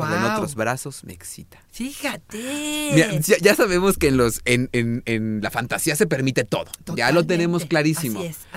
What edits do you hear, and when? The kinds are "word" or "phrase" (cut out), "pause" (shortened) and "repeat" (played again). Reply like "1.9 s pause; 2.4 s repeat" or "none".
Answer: none

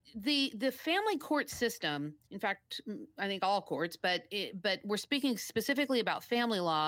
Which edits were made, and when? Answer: 2.2 s pause

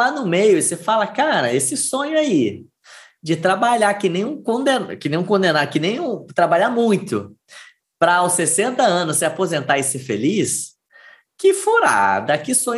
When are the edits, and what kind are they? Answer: none

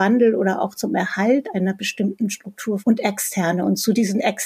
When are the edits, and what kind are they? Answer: 2.8 s word

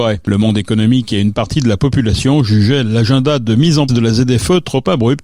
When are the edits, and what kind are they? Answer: 3.9 s word

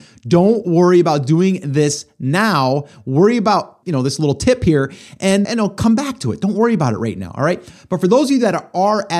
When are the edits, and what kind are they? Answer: 3.8 s phrase; 5.4 s word

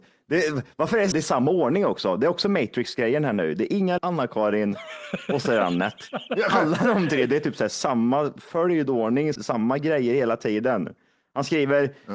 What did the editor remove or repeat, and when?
1.1 s word; 4.0 s word; 9.3 s word

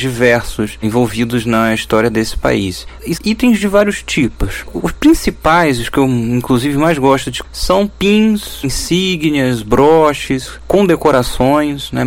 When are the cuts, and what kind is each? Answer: 3.2 s word; 7.4 s word; 8.6 s word

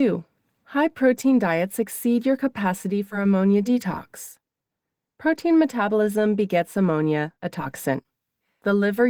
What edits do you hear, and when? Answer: none

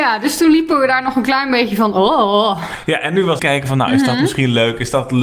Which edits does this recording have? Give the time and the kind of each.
3.4 s phrase

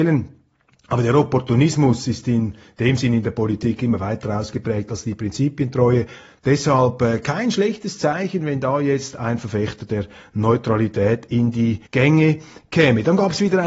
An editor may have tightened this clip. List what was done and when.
11.9 s pause

